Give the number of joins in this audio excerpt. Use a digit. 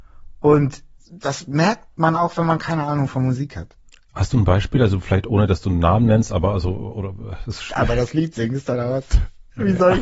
0